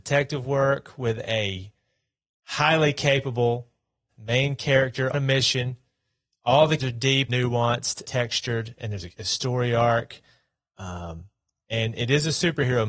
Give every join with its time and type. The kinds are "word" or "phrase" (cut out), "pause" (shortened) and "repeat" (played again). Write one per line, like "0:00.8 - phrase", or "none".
0:04.1 - word
0:05.1 - word
0:06.8 - word
0:07.3 - word
0:08.0 - word
0:09.1 - word